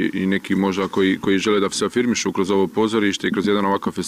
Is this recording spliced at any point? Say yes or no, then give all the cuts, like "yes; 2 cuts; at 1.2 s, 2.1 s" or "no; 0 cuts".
no; 0 cuts